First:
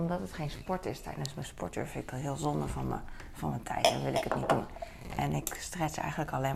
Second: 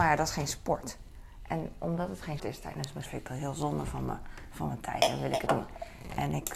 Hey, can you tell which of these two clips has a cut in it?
second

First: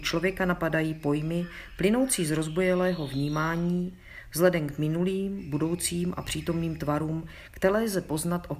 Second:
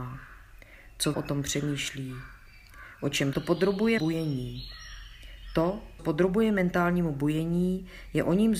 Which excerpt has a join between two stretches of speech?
second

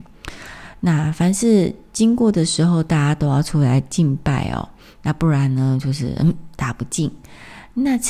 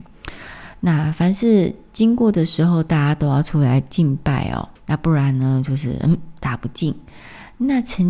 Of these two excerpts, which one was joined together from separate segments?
second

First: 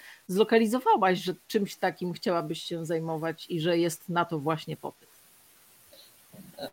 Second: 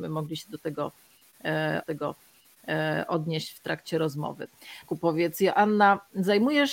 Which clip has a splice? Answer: second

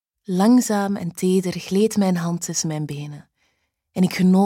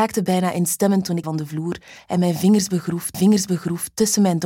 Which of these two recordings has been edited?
second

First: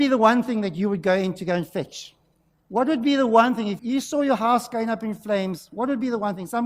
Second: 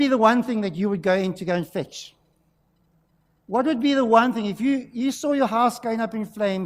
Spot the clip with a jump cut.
first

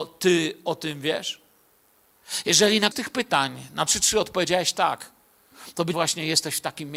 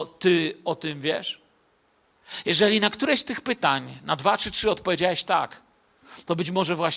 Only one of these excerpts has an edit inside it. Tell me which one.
first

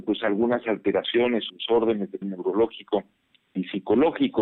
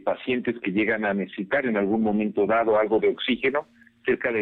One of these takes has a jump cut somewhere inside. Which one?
first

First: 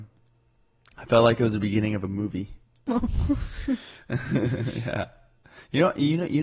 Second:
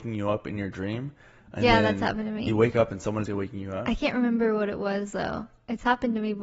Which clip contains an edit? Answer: second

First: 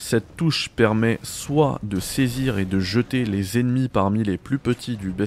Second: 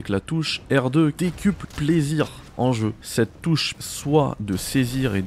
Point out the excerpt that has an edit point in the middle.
second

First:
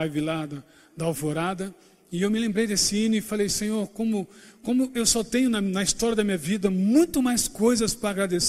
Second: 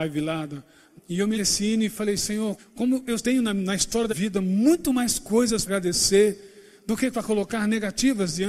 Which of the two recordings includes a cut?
second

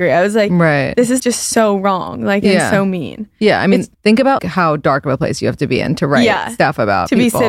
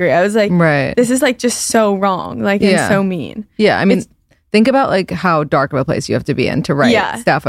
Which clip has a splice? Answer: first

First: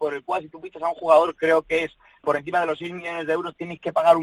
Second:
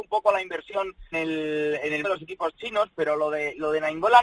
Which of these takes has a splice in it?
second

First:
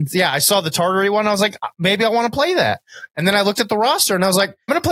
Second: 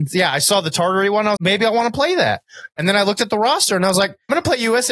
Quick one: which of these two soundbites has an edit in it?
second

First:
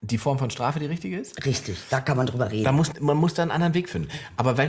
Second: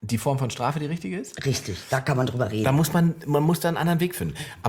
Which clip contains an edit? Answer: first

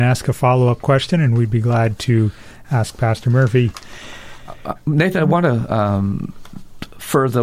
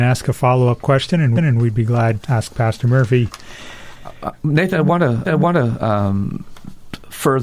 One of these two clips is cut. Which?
second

